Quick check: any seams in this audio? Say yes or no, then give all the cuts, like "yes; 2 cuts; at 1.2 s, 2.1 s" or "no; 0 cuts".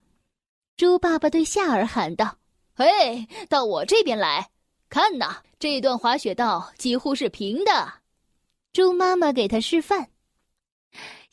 yes; 1 cut; at 5.4 s